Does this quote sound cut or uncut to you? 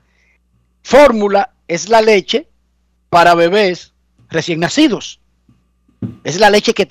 uncut